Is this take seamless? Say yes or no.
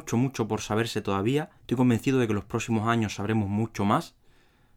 no